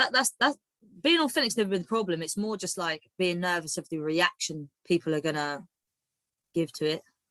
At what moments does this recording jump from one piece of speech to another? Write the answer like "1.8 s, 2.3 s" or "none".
4.8 s

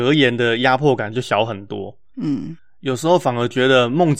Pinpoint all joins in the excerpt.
none

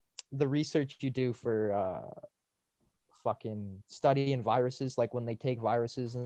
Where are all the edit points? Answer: 3.8 s

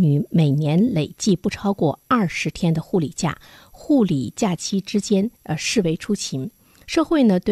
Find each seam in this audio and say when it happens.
5.4 s

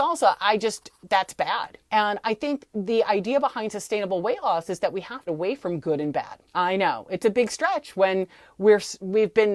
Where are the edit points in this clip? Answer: 1.8 s, 5.3 s, 6.4 s

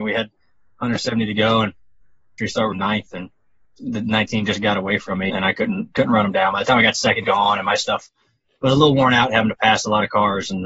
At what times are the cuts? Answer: 2.4 s, 2.7 s, 3.6 s, 5.3 s, 7.2 s

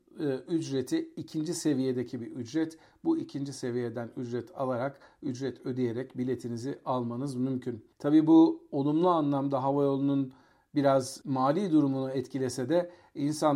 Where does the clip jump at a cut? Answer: none

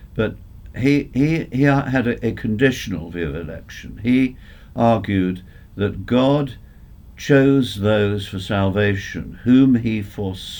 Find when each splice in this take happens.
none

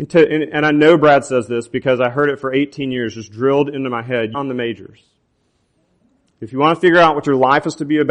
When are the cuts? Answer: 4.3 s

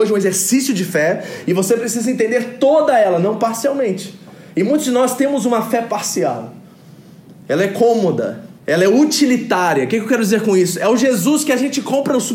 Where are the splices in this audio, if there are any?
8.6 s

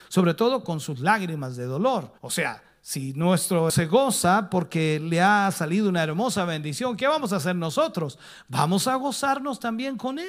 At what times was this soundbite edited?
2.2 s, 3.7 s

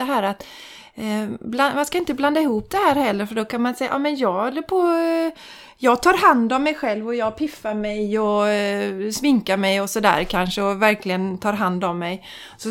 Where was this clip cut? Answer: none

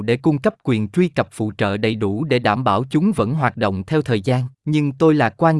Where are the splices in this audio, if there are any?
4.5 s

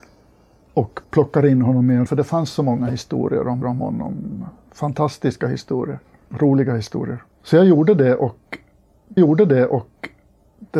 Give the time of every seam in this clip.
1.0 s, 2.1 s, 3.6 s, 6.0 s, 7.3 s, 9.2 s

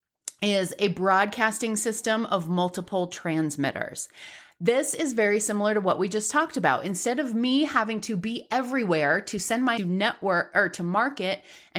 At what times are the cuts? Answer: 9.8 s

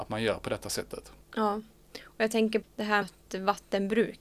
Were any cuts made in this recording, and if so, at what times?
2.6 s, 3.0 s

